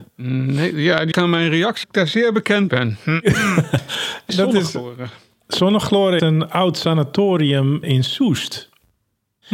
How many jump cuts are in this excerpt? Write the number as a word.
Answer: six